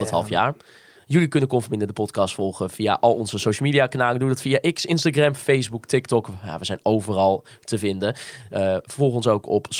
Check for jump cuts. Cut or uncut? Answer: uncut